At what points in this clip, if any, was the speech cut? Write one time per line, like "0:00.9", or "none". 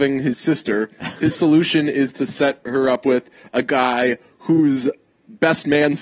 none

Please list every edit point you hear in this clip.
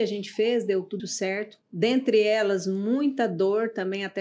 0:01.0
0:01.6

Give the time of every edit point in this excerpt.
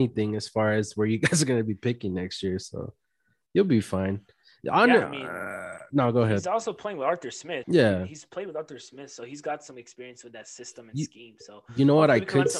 0:07.6

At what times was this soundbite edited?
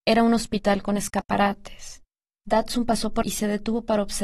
0:02.2
0:03.2

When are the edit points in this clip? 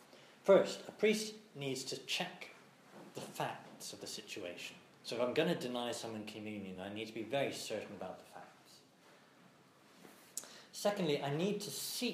none

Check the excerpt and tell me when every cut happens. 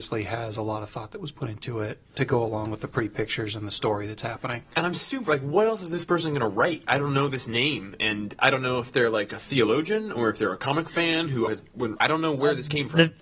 0:02.0
0:11.5
0:12.0

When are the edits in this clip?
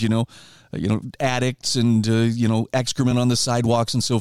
none

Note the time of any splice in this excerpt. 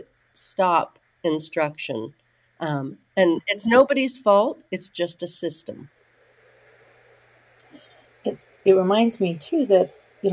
none

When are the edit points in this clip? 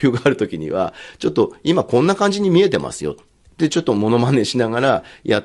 none

